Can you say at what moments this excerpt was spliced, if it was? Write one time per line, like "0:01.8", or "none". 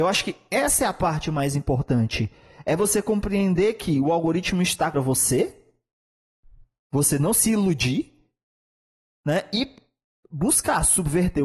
0:04.9

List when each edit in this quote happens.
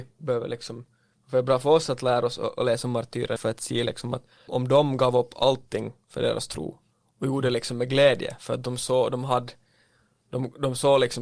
0:03.4
0:04.5

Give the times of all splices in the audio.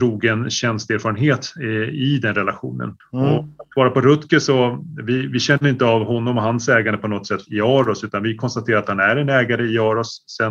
0:03.0

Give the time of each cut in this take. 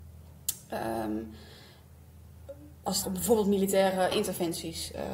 0:03.0
0:04.1

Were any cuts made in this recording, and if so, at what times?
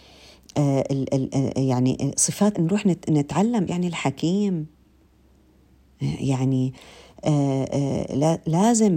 0:02.5
0:03.7

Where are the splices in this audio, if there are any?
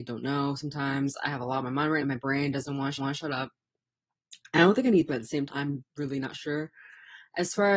0:02.0
0:03.0
0:05.1
0:05.5
0:05.9

